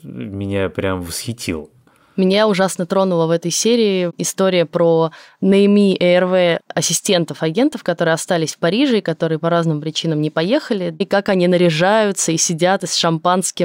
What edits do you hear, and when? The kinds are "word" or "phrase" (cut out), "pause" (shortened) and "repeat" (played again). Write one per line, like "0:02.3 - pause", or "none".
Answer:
none